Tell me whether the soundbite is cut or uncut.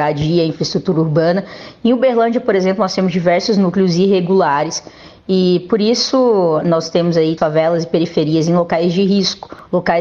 cut